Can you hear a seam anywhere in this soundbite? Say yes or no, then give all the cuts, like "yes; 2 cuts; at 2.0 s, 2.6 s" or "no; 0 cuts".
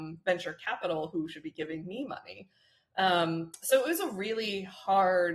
no; 0 cuts